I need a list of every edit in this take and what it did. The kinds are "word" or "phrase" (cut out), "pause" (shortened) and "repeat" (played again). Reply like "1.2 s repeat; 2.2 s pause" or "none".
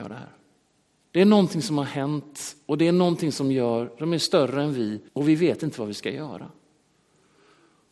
5.1 s pause